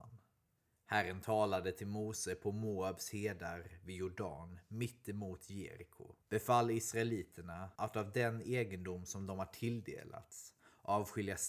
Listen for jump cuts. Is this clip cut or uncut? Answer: cut